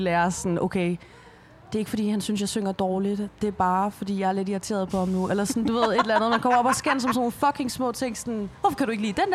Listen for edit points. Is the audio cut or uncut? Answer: uncut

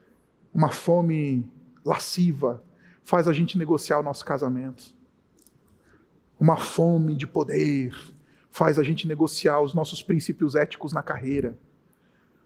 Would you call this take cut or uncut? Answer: uncut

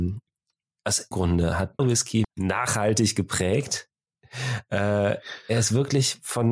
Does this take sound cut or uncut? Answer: cut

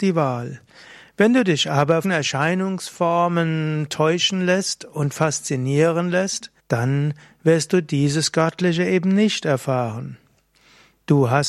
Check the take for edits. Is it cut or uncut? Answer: cut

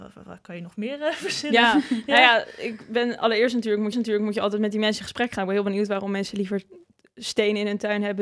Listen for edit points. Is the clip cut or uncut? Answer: cut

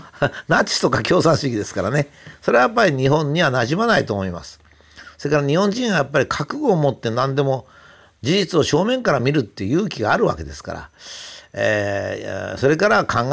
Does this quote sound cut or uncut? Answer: uncut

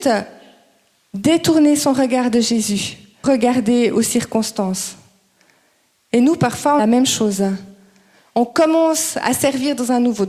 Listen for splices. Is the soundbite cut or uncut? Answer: cut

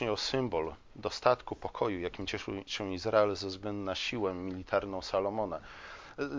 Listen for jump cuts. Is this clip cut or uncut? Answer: uncut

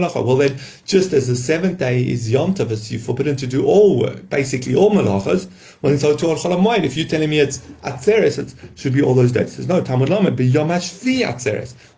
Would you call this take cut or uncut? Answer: uncut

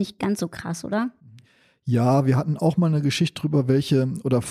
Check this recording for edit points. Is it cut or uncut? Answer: cut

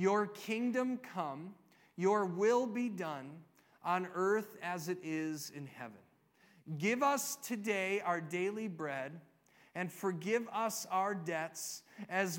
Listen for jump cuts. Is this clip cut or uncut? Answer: uncut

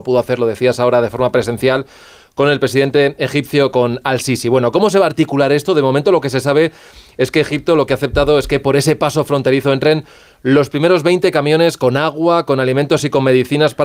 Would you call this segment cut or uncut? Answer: uncut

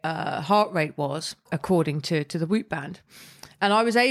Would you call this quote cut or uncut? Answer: cut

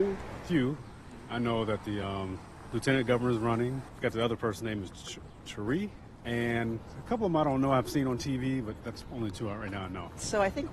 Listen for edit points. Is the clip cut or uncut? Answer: uncut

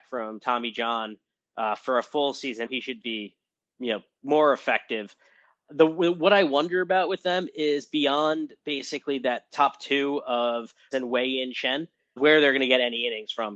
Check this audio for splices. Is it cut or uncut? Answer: cut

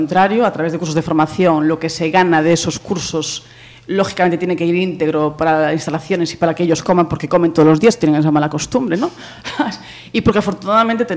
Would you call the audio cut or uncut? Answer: uncut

